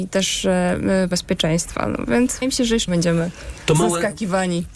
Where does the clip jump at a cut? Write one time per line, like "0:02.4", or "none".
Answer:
0:01.1
0:02.4
0:02.9